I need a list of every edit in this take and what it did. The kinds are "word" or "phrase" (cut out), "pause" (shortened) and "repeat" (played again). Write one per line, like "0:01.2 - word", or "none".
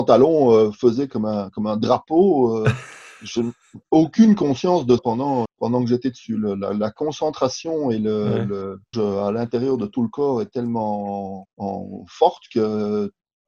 0:05.0 - word
0:05.4 - word
0:08.9 - word
0:11.4 - word